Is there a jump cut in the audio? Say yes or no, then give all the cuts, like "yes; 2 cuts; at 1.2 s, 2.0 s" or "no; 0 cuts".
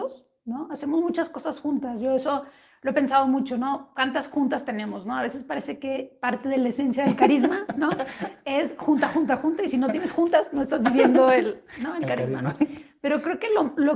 no; 0 cuts